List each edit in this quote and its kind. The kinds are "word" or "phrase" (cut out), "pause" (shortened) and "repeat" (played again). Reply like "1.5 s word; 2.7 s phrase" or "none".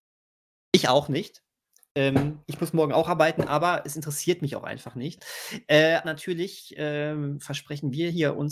6.0 s word